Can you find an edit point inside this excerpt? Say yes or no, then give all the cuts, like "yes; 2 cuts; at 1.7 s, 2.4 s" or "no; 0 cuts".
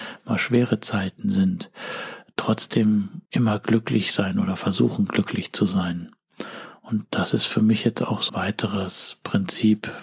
yes; 2 cuts; at 3.3 s, 8.3 s